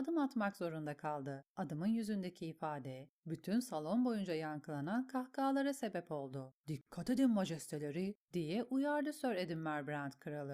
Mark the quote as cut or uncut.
cut